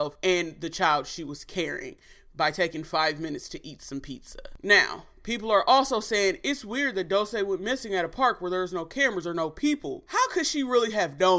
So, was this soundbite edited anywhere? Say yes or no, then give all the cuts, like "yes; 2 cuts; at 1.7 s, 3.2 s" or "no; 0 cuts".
no; 0 cuts